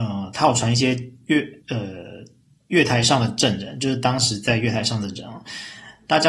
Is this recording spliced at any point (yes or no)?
yes